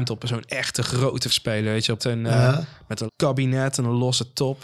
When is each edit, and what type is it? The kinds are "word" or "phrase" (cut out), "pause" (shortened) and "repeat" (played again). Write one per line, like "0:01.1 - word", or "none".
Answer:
0:01.3 - word
0:02.0 - word
0:03.1 - word